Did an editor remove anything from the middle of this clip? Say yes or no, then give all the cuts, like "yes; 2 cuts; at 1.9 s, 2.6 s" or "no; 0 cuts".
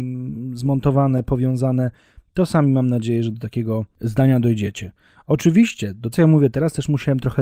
yes; 1 cut; at 6.1 s